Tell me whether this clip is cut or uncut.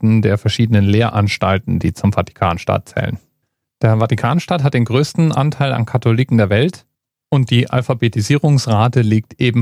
uncut